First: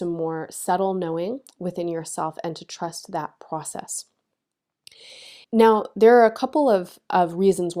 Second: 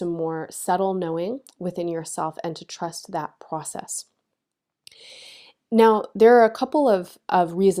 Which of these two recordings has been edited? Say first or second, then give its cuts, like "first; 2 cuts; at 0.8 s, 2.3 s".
first; 1 cut; at 5.4 s